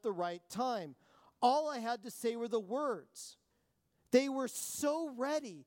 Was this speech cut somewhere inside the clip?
no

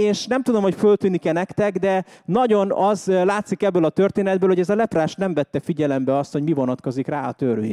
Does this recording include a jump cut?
no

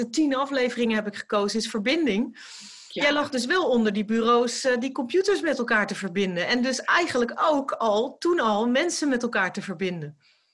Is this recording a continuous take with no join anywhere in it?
yes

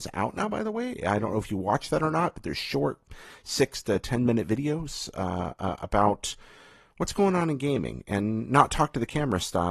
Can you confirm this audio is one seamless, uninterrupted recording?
yes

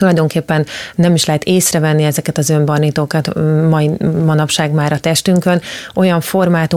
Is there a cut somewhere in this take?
no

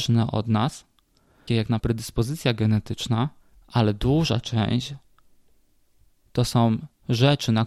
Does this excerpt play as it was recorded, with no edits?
no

